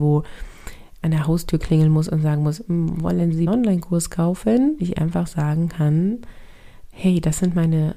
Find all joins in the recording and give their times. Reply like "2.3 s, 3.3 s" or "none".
3.5 s, 4.8 s, 6.9 s